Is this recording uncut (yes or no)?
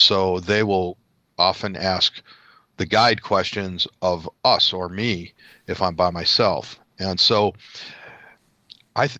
yes